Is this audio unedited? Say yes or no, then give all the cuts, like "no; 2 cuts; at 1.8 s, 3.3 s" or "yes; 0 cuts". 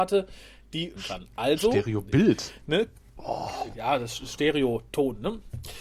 no; 1 cut; at 1.0 s